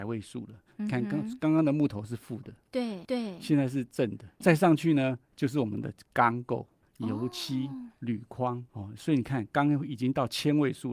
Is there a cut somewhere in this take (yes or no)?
yes